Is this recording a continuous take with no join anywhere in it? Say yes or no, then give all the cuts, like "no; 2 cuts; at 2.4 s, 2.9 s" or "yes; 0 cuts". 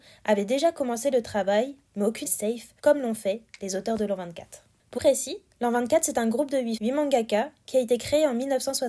no; 4 cuts; at 2.2 s, 2.8 s, 5.0 s, 6.8 s